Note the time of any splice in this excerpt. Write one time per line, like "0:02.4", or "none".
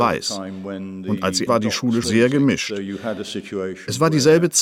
0:01.5
0:02.0